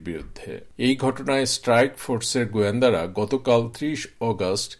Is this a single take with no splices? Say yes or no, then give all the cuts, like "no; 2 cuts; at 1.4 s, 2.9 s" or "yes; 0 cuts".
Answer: yes; 0 cuts